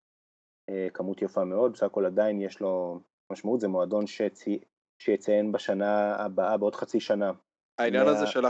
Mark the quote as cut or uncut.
uncut